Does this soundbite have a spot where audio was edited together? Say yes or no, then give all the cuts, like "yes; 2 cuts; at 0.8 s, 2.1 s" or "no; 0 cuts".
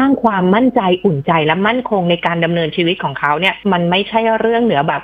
yes; 1 cut; at 3.6 s